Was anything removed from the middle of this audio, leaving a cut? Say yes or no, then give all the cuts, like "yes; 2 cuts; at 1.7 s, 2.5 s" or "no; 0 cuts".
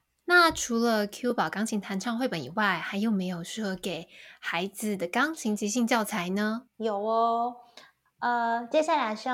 yes; 2 cuts; at 6.7 s, 8.1 s